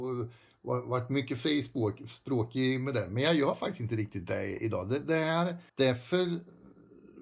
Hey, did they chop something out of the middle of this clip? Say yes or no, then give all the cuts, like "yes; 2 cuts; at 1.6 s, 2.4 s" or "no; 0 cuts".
yes; 1 cut; at 5.7 s